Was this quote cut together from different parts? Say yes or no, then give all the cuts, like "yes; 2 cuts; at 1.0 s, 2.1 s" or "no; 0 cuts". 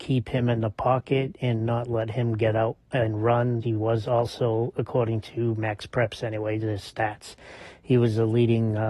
yes; 1 cut; at 3.6 s